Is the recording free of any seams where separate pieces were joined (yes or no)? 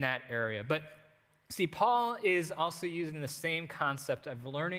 yes